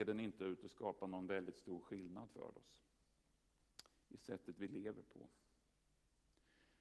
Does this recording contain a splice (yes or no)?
no